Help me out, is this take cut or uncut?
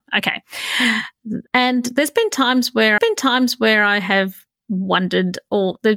cut